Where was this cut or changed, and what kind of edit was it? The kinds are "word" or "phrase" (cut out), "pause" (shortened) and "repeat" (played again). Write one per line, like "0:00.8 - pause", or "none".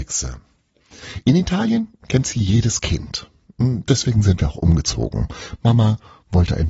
none